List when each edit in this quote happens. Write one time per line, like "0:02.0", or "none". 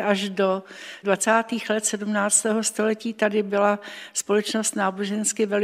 0:01.0